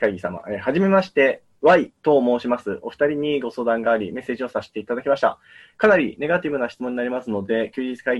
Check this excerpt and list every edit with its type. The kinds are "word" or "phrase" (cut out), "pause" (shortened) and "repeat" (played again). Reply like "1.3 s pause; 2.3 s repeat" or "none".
none